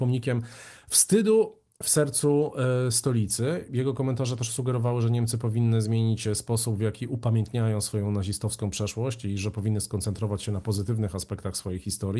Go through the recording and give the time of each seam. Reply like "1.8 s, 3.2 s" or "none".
none